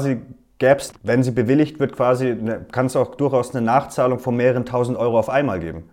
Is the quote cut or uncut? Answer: cut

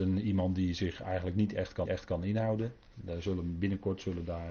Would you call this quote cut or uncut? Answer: cut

